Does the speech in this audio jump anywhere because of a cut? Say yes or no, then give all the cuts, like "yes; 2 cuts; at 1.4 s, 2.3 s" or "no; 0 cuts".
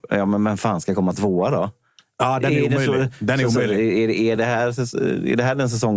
no; 0 cuts